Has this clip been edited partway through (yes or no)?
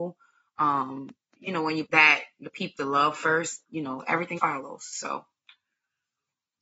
yes